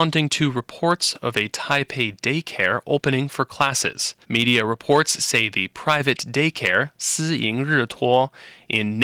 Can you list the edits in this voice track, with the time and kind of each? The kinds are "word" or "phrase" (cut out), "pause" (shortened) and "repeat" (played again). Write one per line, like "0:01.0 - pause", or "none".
0:04.2 - pause